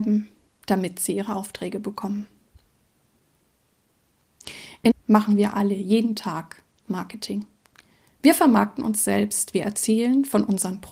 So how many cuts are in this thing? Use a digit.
1